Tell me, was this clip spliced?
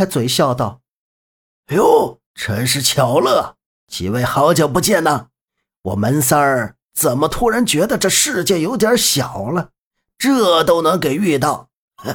yes; 2 cuts; at 2.2 s, 3.6 s

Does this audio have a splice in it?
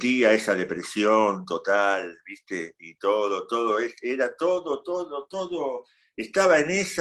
no; 0 cuts

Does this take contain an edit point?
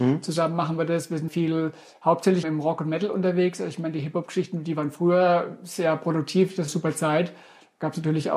yes; 3 cuts; at 1.3 s, 2.4 s, 6.7 s

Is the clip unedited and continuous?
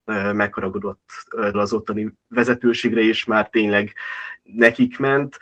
no; 3 cuts; at 1.5 s, 2.2 s, 4.4 s

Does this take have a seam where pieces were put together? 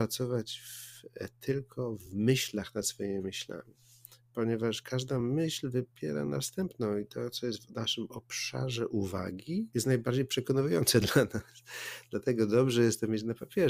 no; 0 cuts

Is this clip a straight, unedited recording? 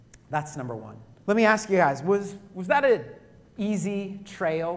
no; 1 cut; at 1.2 s

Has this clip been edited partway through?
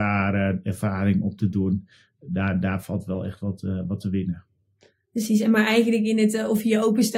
no; 0 cuts

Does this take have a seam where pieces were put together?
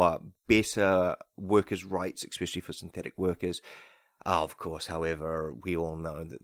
no; 0 cuts

